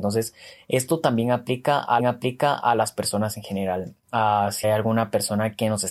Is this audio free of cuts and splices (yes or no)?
no